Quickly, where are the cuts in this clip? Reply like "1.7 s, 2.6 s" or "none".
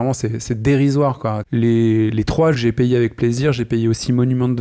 2.5 s